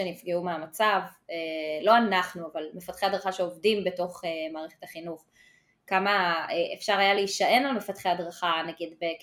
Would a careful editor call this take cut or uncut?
uncut